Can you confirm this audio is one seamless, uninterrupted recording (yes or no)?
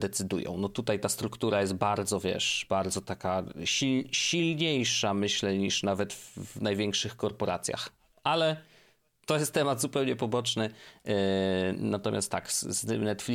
yes